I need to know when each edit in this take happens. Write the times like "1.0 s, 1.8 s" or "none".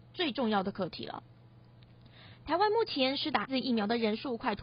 3.5 s